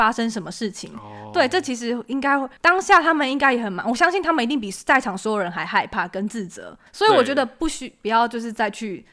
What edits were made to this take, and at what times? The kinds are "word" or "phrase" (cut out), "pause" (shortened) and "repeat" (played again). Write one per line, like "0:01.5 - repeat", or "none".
0:02.6 - pause
0:06.9 - pause